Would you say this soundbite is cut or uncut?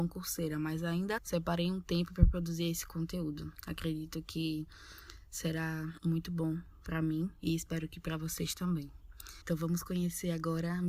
cut